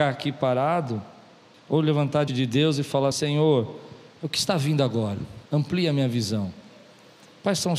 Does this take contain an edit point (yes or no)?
yes